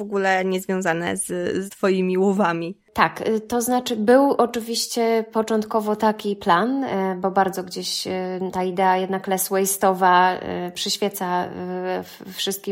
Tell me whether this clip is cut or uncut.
cut